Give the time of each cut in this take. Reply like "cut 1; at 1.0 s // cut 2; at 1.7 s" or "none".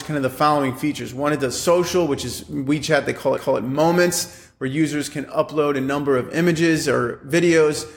cut 1; at 3.4 s